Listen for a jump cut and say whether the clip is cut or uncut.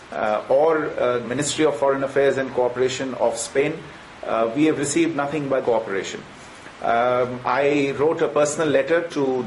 cut